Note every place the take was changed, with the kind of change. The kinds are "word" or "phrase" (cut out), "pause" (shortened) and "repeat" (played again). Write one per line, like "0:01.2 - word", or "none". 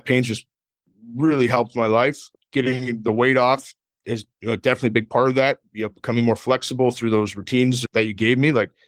0:04.3 - pause